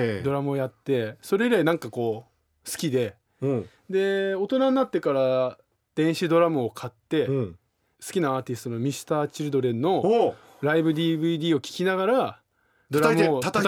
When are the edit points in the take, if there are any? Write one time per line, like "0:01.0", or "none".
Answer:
none